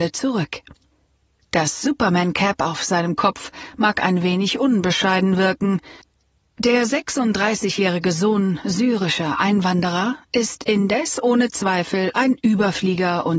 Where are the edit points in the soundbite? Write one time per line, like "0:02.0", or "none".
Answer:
none